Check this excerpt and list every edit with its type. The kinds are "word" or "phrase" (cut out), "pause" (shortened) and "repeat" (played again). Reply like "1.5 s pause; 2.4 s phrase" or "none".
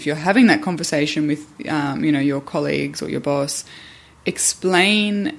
none